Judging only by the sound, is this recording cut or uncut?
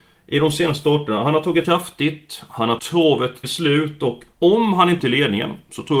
cut